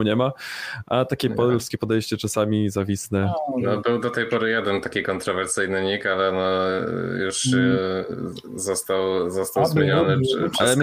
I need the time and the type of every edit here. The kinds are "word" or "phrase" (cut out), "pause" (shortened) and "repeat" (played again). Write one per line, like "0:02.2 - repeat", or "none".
none